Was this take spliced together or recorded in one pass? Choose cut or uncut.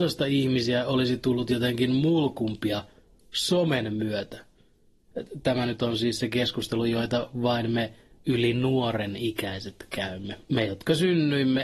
uncut